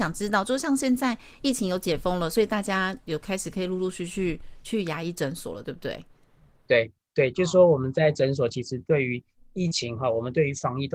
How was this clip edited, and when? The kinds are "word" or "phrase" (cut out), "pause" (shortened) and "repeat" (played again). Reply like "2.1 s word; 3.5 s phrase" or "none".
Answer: none